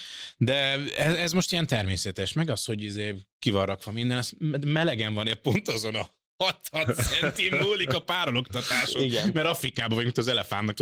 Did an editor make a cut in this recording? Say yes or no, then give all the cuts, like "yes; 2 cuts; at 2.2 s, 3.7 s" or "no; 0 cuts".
no; 0 cuts